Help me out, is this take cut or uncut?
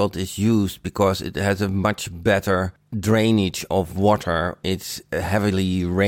cut